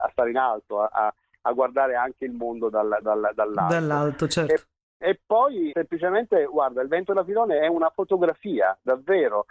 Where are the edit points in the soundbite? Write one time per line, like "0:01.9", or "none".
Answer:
0:03.0
0:05.7